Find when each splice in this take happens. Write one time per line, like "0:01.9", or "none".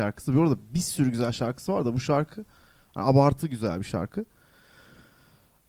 none